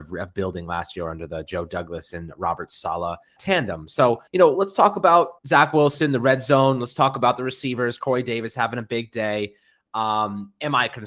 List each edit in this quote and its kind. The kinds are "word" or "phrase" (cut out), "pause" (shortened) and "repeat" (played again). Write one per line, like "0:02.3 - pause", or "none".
0:03.4 - word
0:04.3 - pause
0:05.4 - pause

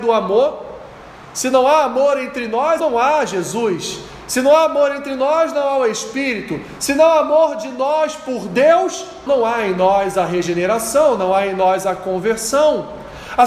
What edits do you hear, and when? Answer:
0:02.8 - word
0:09.3 - word

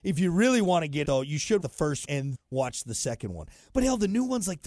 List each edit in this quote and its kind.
0:01.0 - phrase
0:01.6 - word
0:02.0 - word
0:02.3 - word

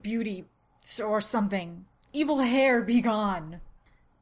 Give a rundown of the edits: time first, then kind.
none

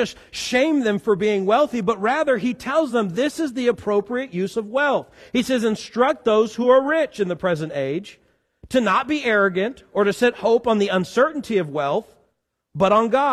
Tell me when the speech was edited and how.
none

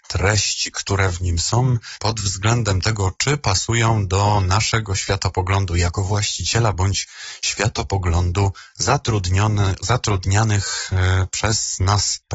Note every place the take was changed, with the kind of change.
none

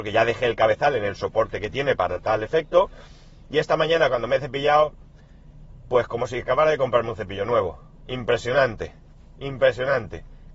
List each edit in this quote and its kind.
none

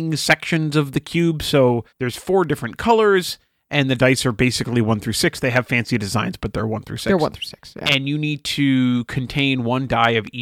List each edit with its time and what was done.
0:01.9 - pause

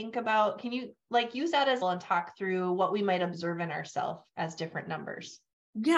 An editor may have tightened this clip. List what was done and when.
0:01.8 - phrase

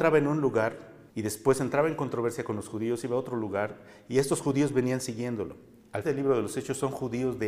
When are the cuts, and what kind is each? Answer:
0:01.1 - pause
0:06.0 - word

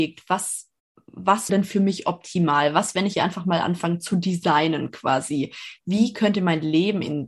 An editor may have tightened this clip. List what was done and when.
0:01.5 - word
0:03.1 - word

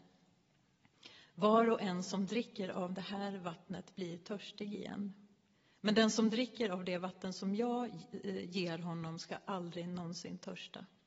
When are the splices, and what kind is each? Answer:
none

